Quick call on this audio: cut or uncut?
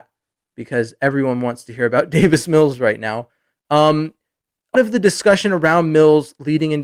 cut